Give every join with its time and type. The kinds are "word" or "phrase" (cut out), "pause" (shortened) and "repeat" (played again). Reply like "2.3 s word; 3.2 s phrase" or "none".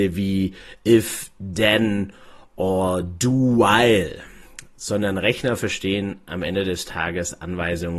none

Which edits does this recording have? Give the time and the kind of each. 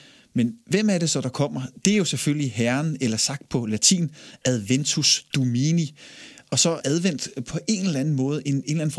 6.8 s word

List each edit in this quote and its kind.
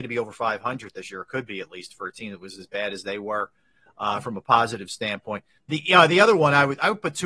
none

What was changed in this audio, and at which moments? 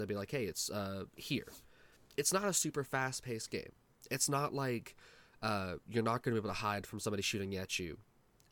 2.0 s pause

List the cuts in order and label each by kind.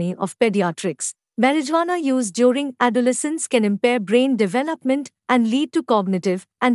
none

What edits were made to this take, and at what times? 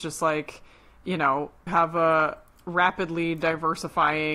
1.7 s word

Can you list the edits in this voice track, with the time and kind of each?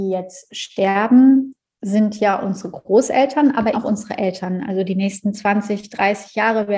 3.7 s word

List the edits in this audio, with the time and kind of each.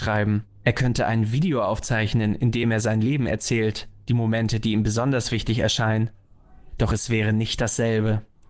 none

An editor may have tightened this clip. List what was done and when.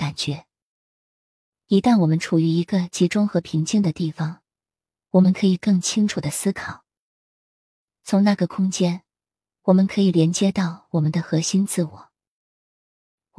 none

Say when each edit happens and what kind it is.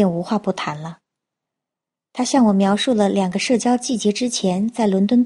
none

